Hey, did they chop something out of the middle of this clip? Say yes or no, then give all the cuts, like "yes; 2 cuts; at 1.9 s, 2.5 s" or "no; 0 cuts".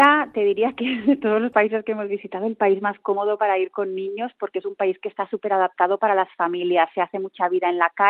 no; 0 cuts